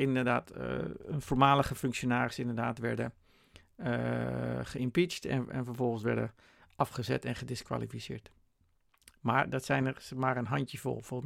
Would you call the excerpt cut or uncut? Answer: uncut